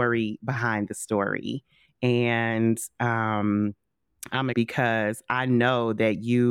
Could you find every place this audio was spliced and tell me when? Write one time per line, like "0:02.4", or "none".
0:04.5